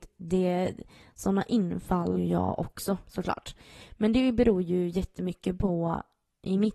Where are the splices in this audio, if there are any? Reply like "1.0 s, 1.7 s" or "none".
2.1 s, 3.0 s